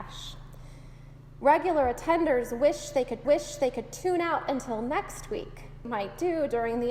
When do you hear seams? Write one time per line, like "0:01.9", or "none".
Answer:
0:03.2
0:05.8